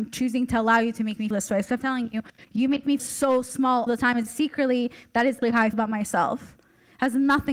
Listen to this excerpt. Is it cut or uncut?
cut